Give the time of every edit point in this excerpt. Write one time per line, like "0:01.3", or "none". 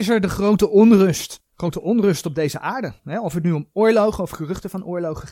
0:01.5
0:03.0